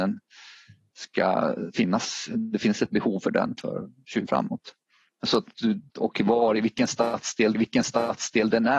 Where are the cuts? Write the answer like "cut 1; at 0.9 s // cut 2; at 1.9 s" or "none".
cut 1; at 4.3 s // cut 2; at 5.9 s // cut 3; at 7.5 s